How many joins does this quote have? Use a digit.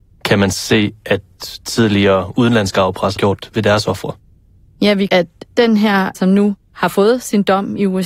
4